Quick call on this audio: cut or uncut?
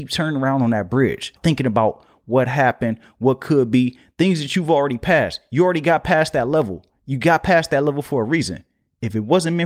cut